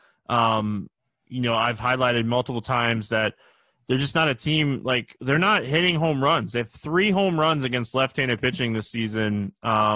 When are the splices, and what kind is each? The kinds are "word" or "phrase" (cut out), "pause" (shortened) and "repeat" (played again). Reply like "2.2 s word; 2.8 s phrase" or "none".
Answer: none

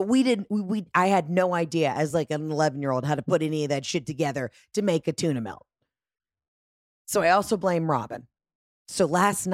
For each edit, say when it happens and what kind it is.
none

